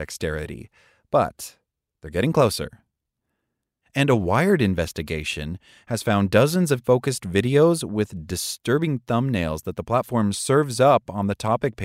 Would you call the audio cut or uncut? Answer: cut